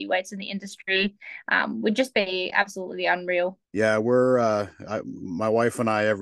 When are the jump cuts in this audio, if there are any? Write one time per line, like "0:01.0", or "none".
0:03.6